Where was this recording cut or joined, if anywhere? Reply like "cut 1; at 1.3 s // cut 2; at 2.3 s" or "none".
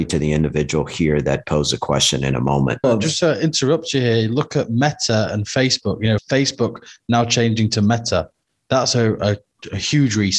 none